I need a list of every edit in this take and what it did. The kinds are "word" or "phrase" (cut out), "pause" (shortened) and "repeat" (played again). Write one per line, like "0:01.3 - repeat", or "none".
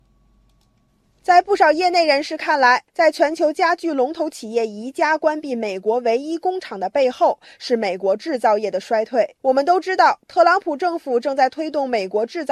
0:09.4 - pause